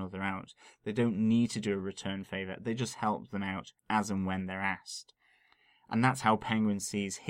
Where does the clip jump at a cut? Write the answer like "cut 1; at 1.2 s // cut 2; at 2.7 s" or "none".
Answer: cut 1; at 3.8 s